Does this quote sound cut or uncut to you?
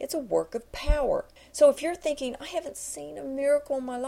cut